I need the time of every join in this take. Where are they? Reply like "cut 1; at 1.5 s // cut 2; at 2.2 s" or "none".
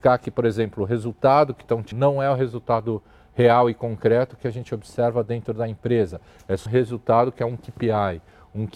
cut 1; at 1.9 s // cut 2; at 6.7 s